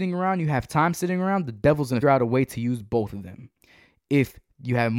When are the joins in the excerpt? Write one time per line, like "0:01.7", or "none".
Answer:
0:02.0